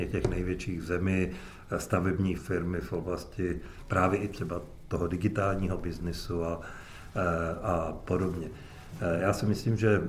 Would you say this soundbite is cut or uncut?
cut